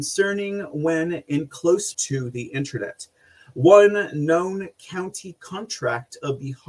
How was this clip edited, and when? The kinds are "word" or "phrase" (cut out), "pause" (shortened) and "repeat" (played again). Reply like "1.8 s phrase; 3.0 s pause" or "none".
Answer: 1.9 s word